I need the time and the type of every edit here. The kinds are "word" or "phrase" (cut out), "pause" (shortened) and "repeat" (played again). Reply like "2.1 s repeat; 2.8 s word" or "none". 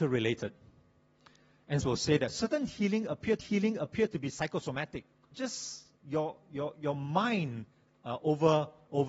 1.8 s phrase; 3.4 s repeat; 5.3 s phrase; 6.0 s pause